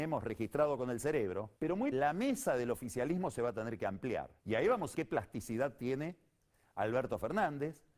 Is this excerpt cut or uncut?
cut